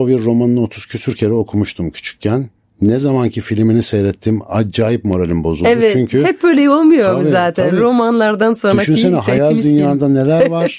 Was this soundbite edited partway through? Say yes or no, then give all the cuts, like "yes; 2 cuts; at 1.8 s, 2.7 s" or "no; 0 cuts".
no; 0 cuts